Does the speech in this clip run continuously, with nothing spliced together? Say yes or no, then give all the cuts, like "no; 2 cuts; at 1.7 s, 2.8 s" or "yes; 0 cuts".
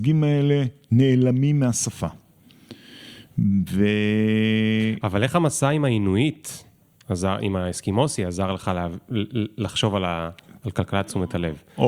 yes; 0 cuts